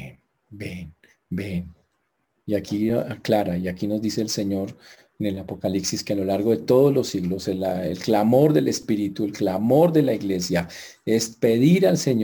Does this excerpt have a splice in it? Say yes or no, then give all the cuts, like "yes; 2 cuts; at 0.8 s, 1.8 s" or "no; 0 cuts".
no; 0 cuts